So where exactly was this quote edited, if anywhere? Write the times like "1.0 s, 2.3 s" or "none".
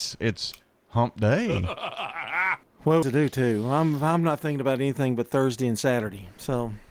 3.0 s